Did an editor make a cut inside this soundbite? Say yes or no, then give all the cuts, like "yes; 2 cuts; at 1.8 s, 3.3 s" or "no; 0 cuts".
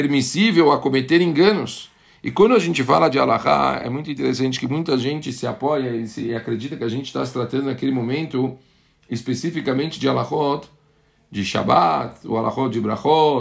no; 0 cuts